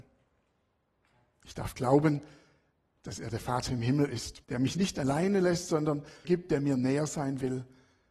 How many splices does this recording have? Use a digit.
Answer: 2